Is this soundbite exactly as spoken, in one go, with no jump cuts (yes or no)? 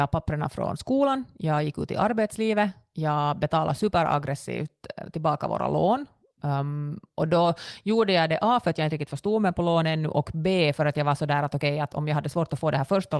yes